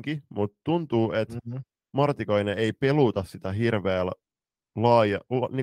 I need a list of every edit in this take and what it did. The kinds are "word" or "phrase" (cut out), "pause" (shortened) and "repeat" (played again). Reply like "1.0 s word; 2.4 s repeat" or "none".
none